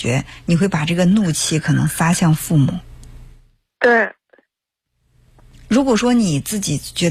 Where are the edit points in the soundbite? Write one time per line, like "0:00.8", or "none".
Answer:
none